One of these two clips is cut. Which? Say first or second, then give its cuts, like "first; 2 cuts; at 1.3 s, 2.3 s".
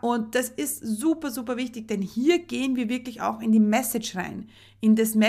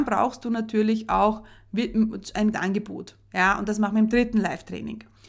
second; 1 cut; at 2.5 s